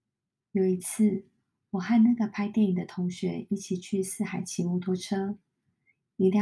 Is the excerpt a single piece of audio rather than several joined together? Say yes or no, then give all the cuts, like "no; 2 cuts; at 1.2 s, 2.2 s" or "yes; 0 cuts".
yes; 0 cuts